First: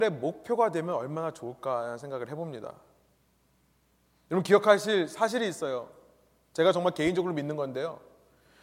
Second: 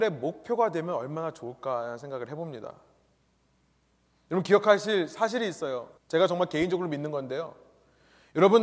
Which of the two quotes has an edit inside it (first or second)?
second